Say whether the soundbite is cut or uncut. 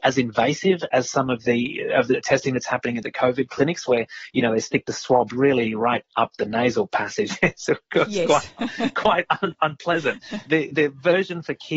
uncut